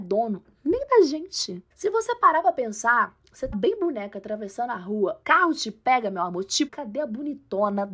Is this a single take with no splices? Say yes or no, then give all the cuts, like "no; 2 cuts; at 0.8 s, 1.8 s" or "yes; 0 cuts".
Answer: no; 4 cuts; at 1.7 s, 3.5 s, 5.2 s, 6.7 s